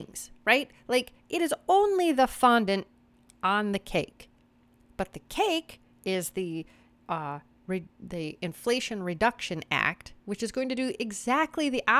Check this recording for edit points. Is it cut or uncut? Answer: uncut